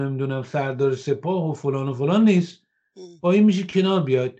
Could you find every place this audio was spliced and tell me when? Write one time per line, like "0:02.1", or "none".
none